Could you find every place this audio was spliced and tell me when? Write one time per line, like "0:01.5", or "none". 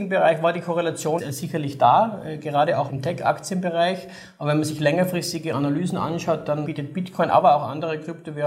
0:01.2
0:02.9
0:06.7

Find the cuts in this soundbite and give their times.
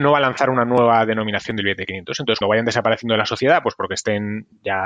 0:02.4

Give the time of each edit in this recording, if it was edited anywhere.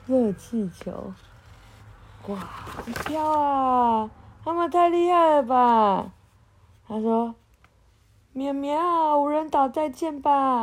none

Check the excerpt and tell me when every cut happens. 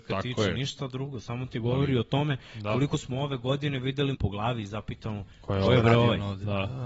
0:04.1
0:05.3

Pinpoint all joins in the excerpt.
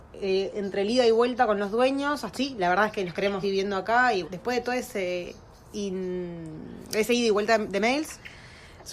0:02.3
0:03.4
0:04.2

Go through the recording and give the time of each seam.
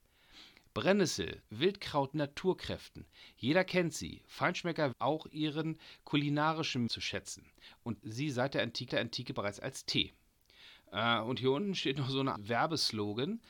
0:01.5
0:02.1
0:04.9
0:06.9
0:08.0
0:08.9
0:12.3

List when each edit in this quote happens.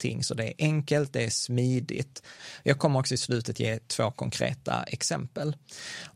none

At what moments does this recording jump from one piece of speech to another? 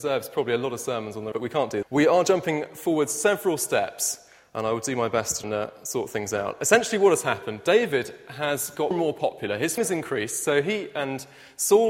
0:01.3
0:01.8
0:05.4
0:08.9
0:09.8

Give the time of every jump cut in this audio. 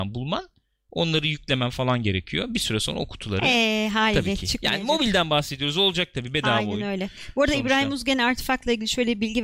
none

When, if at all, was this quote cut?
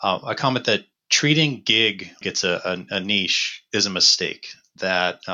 0:02.2

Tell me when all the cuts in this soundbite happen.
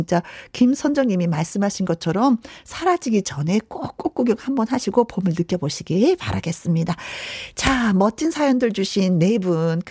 none

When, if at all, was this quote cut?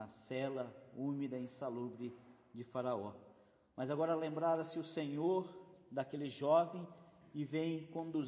none

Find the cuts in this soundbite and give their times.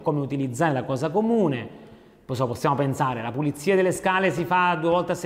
none

